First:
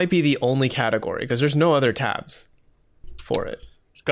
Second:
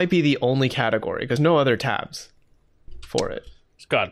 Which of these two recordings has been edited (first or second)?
second